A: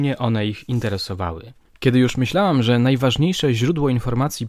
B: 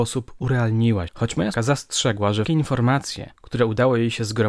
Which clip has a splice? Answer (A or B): B